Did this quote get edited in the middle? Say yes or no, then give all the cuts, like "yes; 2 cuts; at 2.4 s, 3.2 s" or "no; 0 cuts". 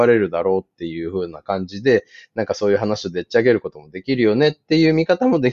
no; 0 cuts